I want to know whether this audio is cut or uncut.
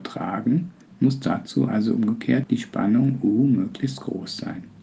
uncut